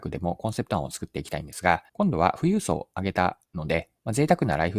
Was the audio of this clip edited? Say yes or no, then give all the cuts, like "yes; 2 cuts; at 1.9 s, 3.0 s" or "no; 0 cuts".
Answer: yes; 2 cuts; at 1.9 s, 3.4 s